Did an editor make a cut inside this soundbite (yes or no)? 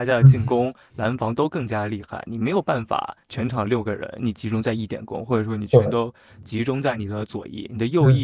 yes